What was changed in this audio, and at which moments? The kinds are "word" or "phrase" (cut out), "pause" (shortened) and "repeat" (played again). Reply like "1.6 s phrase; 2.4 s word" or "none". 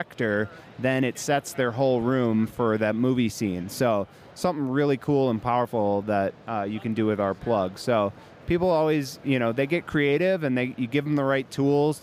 none